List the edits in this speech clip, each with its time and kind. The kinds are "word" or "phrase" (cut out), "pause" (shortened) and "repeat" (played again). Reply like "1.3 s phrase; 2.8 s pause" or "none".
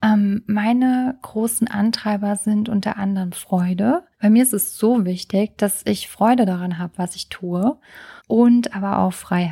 4.1 s pause; 8.2 s pause